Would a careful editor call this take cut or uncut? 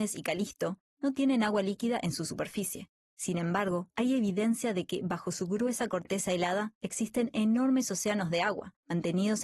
uncut